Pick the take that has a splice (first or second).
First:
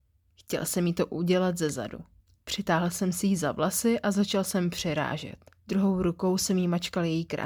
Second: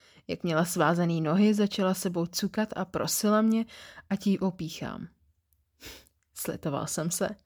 first